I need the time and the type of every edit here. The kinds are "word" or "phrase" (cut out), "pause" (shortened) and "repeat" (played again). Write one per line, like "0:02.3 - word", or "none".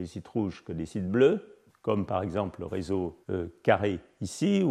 0:01.7 - pause
0:03.2 - pause